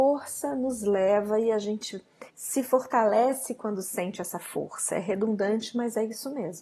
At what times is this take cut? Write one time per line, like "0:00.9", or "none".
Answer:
0:02.3